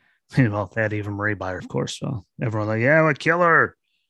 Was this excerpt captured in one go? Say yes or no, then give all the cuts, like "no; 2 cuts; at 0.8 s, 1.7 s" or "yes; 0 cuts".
no; 1 cut; at 1.6 s